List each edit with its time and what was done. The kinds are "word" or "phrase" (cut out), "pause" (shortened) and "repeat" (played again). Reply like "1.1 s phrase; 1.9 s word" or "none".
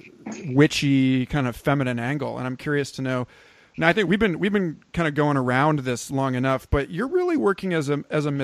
none

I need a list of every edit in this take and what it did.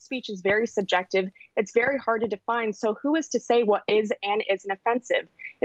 none

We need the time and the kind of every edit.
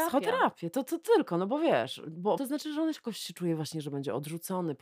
2.4 s word

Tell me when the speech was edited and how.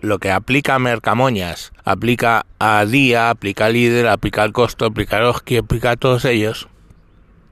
1.8 s pause

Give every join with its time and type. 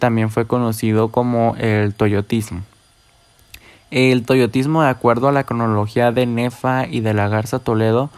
none

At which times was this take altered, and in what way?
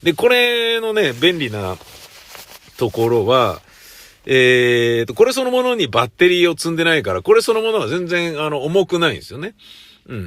none

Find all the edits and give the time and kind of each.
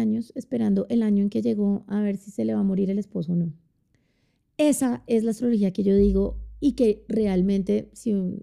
none

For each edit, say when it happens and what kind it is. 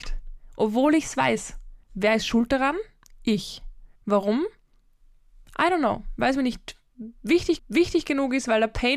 1.8 s pause; 3.9 s pause; 7.6 s repeat

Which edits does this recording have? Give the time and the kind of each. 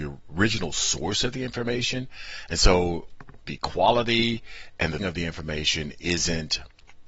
3.4 s word; 5.0 s word

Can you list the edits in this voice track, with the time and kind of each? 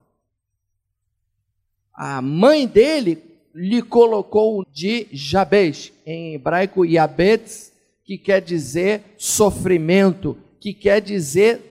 4.6 s word

